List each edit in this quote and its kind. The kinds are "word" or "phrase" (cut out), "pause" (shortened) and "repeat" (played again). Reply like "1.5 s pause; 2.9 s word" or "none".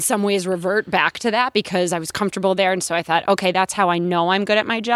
none